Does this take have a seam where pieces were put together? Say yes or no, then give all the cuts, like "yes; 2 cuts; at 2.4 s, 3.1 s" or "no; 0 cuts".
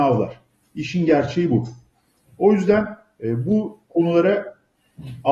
no; 0 cuts